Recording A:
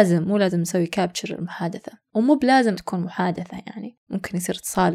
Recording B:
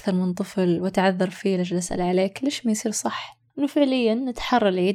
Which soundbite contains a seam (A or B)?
A